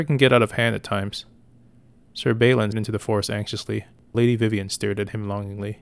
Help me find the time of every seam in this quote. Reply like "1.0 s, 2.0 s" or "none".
2.7 s, 4.1 s